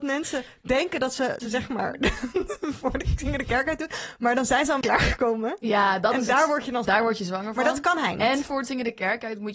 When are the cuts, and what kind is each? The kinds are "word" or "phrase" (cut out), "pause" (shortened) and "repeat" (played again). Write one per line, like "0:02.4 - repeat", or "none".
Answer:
0:01.4 - word
0:04.8 - word
0:06.9 - word